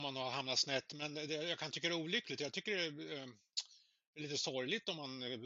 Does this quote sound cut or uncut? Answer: uncut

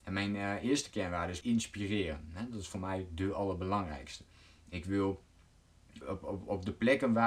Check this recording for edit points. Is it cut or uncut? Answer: cut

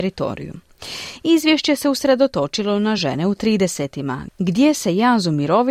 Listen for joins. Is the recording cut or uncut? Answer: uncut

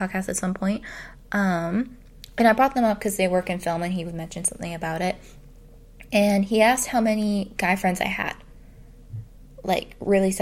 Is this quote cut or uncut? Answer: uncut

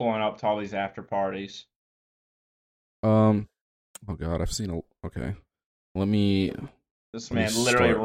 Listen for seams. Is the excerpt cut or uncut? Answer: uncut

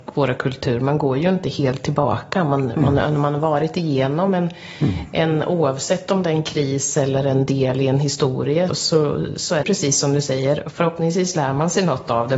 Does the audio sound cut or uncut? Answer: cut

